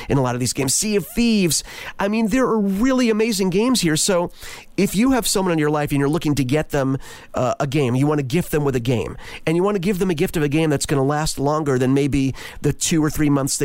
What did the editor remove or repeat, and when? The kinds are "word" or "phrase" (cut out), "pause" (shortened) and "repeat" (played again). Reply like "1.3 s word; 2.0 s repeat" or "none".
none

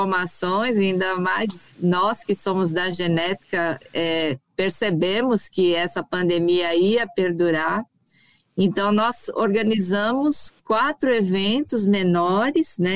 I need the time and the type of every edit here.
none

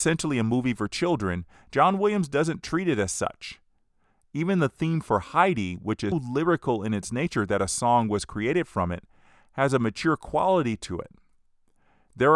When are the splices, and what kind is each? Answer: 6.1 s word

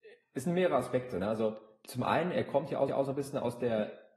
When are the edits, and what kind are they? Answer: 2.9 s repeat

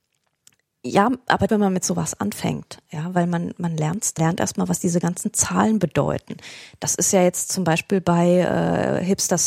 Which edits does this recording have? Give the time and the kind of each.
1.5 s phrase; 4.2 s phrase

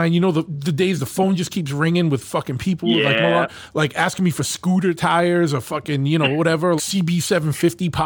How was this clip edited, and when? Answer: 6.8 s word

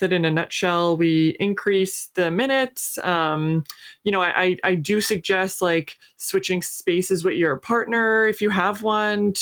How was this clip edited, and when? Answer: 6.0 s pause

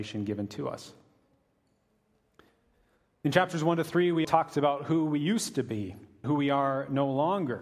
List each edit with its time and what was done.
4.2 s word; 6.2 s word

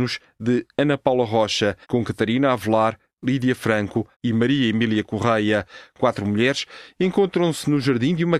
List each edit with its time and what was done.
1.8 s pause; 4.1 s phrase

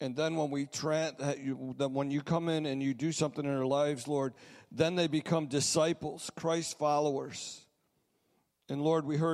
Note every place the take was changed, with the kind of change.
none

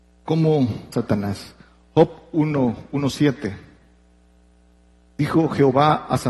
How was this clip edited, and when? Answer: 0.9 s word

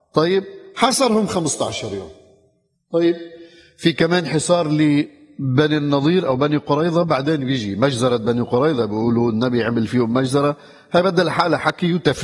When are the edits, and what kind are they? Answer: none

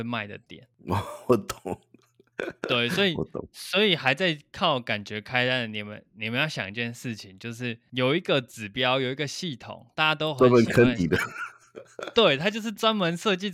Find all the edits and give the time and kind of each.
none

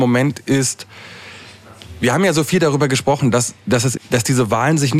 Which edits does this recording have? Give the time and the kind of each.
4.0 s word

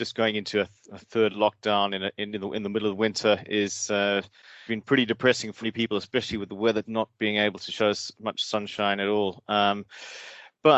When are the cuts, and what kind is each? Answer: 4.7 s word; 5.6 s word; 6.8 s word

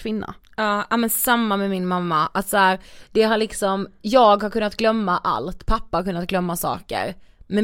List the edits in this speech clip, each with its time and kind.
none

